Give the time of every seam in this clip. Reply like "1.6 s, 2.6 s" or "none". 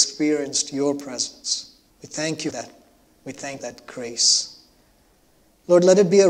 1.9 s, 2.5 s, 3.6 s